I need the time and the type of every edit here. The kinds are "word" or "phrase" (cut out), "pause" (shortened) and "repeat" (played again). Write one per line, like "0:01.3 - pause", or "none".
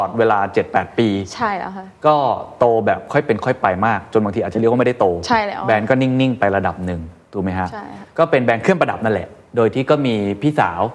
none